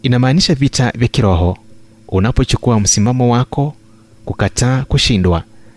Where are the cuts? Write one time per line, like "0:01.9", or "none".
none

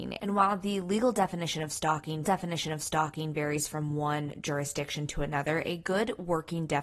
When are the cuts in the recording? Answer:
0:02.2

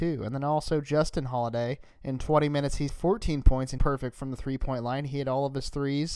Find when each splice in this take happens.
0:01.9
0:02.9
0:03.8

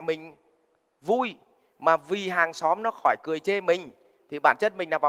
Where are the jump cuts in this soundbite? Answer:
none

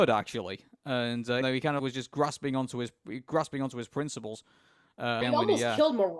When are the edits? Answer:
0:01.4
0:01.8
0:05.2

